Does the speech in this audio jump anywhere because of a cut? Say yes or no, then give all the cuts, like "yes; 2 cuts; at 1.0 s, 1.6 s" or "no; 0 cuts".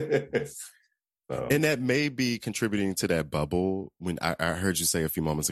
no; 0 cuts